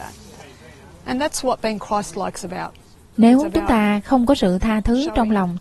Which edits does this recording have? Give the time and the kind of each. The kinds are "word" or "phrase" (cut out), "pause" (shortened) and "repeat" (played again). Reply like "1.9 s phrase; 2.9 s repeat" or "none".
none